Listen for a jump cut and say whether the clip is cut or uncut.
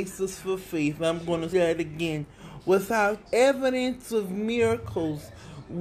cut